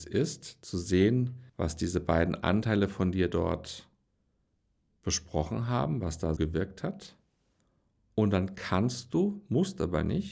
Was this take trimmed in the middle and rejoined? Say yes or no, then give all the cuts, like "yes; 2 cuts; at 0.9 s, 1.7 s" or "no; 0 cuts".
yes; 2 cuts; at 1.5 s, 6.4 s